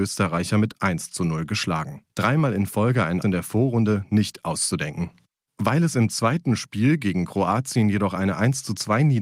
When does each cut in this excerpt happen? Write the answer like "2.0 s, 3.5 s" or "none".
2.1 s, 3.2 s

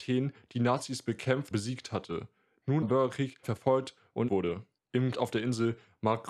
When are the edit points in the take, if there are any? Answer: 1.5 s, 2.8 s, 3.4 s, 4.3 s, 5.1 s

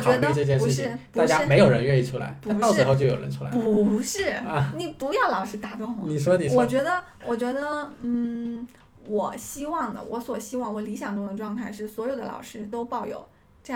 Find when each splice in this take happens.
none

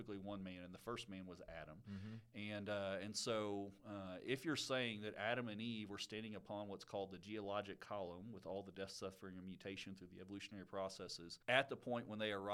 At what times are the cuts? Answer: 11.4 s

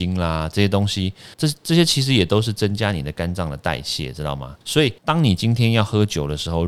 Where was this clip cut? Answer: 1.3 s, 4.6 s, 5.0 s

